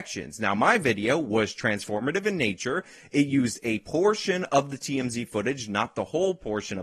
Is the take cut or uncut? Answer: uncut